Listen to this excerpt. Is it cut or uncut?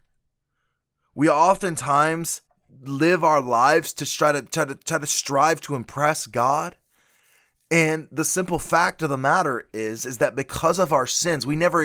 cut